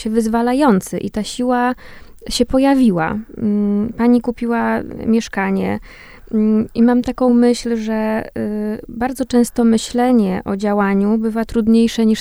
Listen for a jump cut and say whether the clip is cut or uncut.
uncut